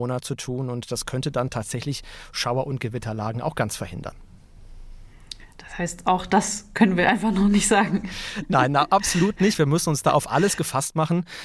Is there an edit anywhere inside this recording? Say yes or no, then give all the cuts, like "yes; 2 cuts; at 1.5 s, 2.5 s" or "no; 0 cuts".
no; 0 cuts